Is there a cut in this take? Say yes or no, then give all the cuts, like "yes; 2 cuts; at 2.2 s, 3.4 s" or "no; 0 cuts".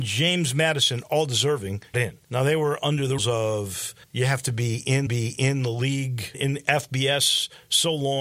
yes; 6 cuts; at 1.9 s, 2.2 s, 3.2 s, 4.0 s, 5.1 s, 6.3 s